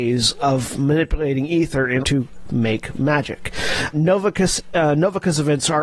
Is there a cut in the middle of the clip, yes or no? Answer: yes